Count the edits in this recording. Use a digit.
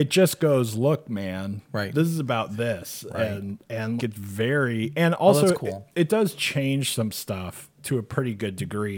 2